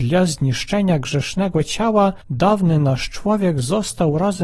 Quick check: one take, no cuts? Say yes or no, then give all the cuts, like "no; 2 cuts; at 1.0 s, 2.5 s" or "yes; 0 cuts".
no; 1 cut; at 2.2 s